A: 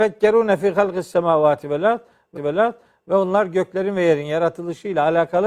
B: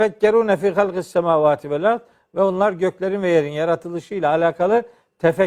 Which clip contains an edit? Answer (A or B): A